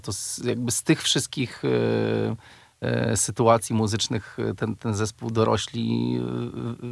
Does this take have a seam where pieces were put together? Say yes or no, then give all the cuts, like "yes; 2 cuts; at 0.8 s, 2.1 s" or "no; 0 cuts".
no; 0 cuts